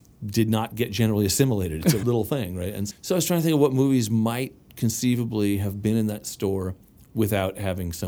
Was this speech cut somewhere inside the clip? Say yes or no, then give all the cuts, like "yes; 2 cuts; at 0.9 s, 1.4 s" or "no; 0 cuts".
yes; 2 cuts; at 2.0 s, 2.9 s